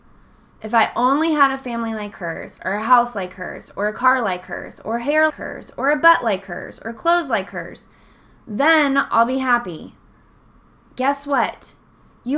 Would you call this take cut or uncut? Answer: cut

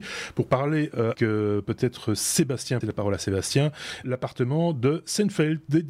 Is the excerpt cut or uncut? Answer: cut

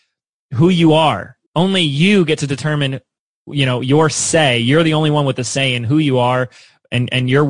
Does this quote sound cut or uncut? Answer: cut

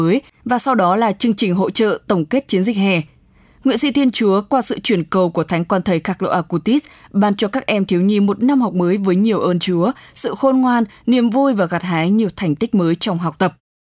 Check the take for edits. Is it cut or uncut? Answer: uncut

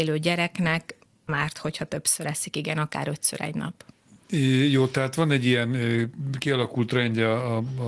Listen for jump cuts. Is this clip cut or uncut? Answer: cut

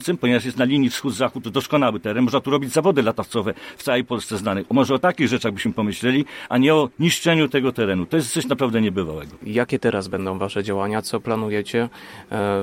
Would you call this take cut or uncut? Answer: uncut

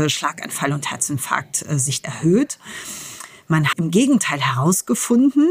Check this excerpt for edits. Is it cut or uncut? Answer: cut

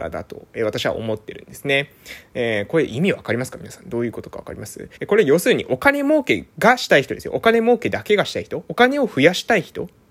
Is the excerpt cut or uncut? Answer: cut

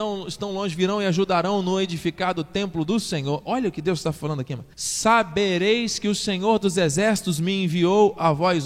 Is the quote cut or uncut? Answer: cut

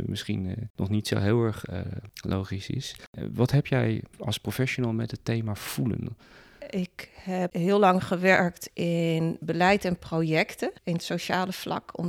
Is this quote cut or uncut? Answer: cut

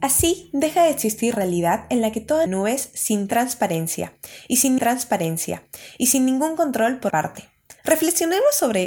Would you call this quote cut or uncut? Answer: cut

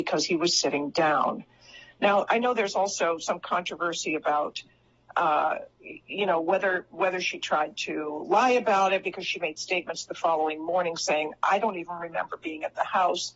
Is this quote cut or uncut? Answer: uncut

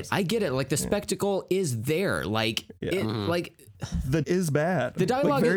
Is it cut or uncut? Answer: cut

